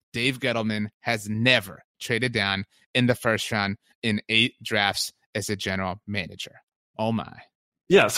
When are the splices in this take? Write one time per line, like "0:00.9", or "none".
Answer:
none

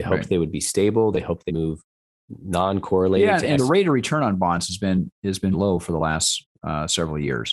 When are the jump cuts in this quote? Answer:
0:01.5
0:02.2
0:03.6
0:05.5

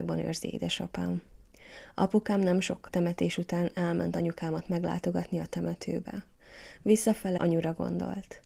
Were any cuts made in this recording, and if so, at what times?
0:02.9
0:07.4

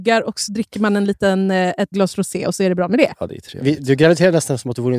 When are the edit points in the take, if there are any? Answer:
0:01.9

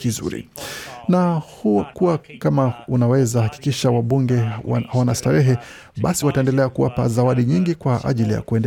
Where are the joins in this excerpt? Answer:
0:01.9
0:06.2

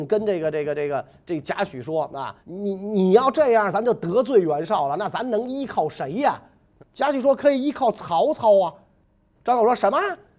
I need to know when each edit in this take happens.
0:02.4
0:06.8

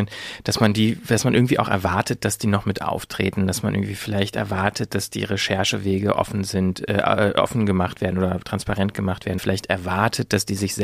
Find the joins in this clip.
0:09.4

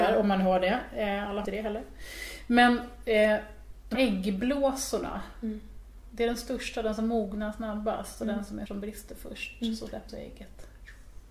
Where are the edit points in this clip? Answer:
0:01.4
0:03.9
0:08.7
0:10.1

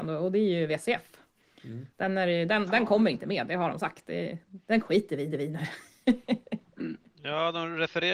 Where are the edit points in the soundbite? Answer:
0:01.9
0:05.3

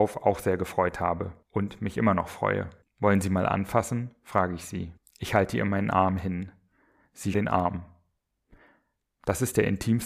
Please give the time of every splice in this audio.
0:01.4
0:02.8
0:05.0
0:07.3

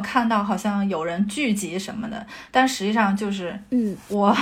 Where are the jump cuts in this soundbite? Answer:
none

